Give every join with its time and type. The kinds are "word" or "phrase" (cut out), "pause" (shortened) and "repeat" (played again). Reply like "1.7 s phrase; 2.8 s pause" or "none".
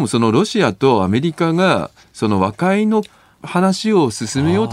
none